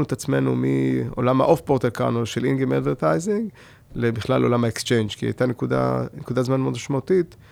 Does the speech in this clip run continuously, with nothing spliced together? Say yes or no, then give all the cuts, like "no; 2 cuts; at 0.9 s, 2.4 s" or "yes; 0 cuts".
yes; 0 cuts